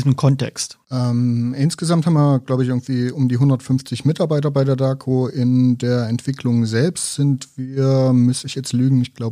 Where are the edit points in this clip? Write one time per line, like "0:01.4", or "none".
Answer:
none